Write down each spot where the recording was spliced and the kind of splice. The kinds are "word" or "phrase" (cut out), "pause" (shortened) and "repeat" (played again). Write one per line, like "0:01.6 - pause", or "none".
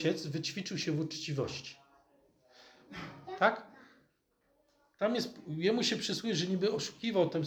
none